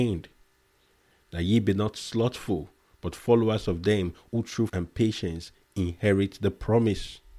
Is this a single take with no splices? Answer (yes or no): no